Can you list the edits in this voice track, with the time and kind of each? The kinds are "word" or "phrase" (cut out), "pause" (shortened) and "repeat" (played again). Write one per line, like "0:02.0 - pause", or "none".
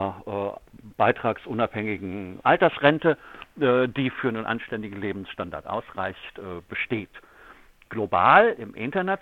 0:02.4 - word